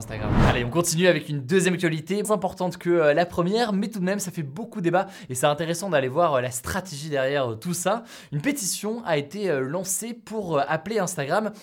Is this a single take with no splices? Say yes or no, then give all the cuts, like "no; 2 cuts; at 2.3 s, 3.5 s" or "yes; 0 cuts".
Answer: no; 1 cut; at 2.2 s